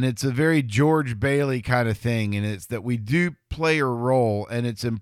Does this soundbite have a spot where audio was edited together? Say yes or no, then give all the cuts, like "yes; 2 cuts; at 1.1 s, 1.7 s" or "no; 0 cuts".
no; 0 cuts